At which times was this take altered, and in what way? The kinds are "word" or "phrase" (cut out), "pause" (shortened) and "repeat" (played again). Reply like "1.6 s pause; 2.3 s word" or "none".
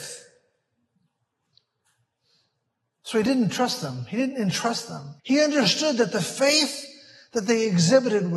5.2 s pause